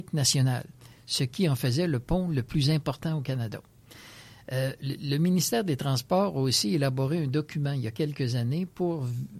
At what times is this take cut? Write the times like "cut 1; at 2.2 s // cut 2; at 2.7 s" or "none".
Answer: none